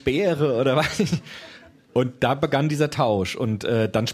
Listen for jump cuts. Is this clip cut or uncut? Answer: uncut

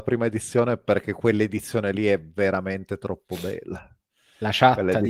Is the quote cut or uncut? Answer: uncut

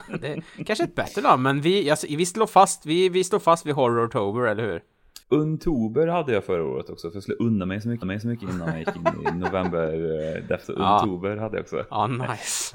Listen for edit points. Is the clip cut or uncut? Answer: cut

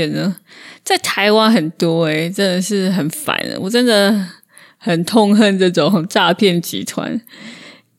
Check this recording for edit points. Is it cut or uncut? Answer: uncut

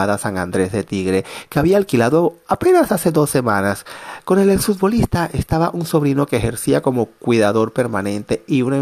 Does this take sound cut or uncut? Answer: uncut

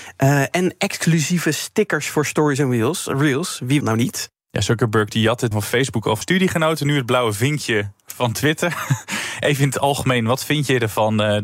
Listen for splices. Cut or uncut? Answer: cut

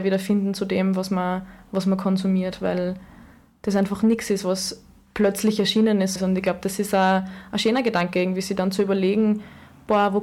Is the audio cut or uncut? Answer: cut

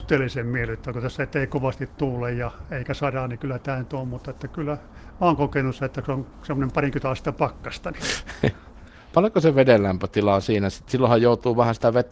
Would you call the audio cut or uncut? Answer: uncut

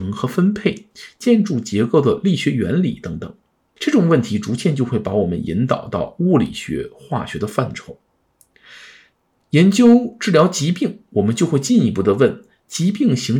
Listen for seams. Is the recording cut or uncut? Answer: uncut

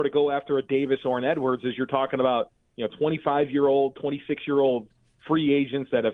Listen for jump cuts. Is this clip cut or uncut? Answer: uncut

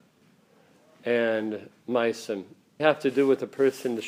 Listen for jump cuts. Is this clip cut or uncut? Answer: cut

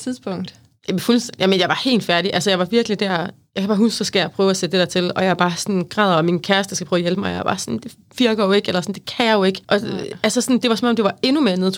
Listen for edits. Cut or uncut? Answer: cut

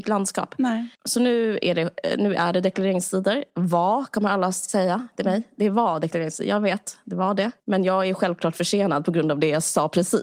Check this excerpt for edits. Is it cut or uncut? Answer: cut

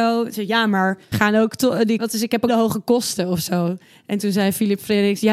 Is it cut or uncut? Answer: cut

